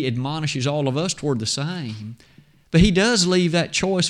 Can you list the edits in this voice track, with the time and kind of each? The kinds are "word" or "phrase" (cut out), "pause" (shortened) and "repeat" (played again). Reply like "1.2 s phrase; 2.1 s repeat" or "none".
none